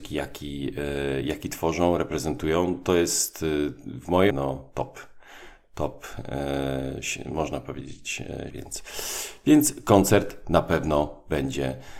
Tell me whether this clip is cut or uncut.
cut